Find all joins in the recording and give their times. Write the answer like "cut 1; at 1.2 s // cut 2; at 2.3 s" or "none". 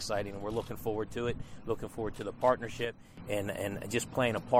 none